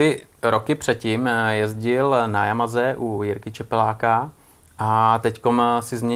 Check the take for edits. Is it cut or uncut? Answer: uncut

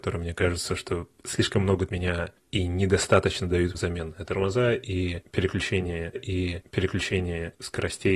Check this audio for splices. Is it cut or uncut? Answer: cut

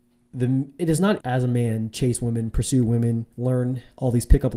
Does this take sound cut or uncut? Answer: cut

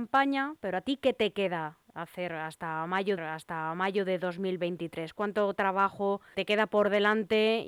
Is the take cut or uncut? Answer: cut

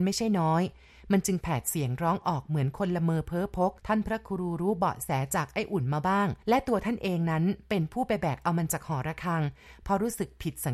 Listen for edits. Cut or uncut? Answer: cut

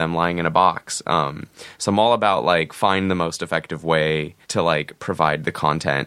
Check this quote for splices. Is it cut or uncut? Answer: cut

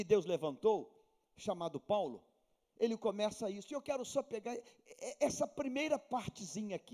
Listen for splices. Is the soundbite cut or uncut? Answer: uncut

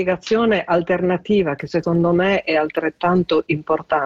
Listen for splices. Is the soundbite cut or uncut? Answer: uncut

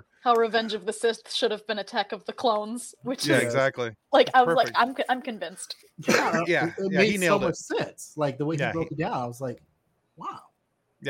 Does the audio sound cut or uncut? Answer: uncut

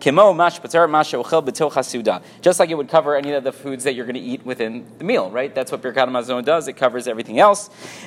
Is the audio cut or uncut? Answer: uncut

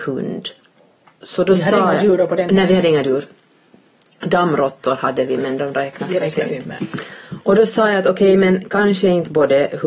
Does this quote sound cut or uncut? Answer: uncut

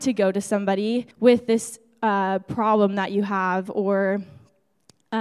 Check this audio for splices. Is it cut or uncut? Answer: cut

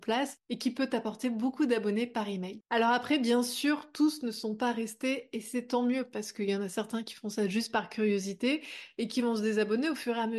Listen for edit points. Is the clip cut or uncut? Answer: uncut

